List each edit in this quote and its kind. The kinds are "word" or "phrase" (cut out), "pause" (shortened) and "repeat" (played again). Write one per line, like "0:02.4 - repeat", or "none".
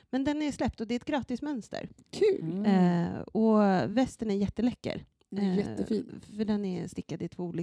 none